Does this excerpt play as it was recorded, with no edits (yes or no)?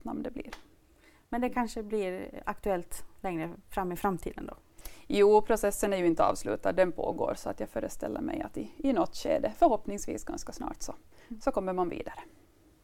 yes